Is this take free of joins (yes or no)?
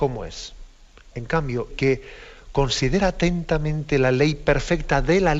no